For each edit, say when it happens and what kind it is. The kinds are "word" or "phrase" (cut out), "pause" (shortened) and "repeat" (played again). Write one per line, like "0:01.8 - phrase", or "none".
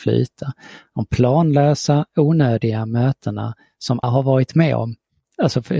0:04.0 - word